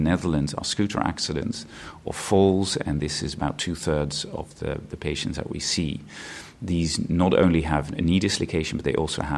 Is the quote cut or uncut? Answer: uncut